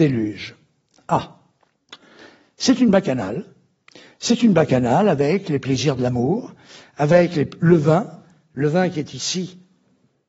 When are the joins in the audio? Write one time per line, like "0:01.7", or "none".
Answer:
none